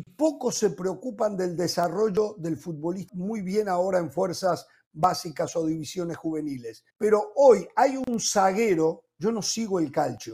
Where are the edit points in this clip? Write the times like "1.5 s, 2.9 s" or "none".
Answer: 3.1 s, 6.9 s